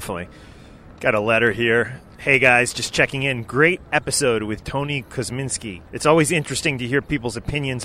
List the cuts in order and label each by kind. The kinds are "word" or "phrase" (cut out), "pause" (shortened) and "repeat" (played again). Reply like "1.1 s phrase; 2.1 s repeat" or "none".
5.9 s pause